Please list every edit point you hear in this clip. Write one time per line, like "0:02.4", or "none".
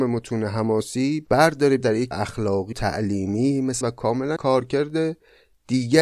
0:01.8
0:02.1
0:02.7
0:03.8
0:04.4